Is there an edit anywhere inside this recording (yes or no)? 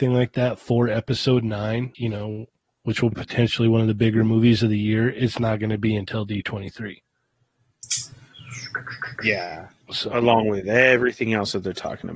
yes